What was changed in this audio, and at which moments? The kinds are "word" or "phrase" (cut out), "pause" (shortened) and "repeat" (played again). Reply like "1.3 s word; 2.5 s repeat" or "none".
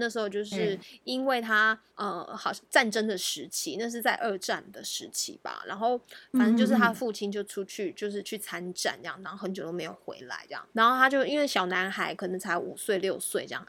1.9 s pause; 10.7 s pause